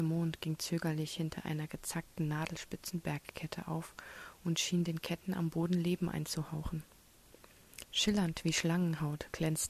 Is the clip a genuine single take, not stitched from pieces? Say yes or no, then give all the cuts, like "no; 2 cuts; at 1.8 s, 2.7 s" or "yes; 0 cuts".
yes; 0 cuts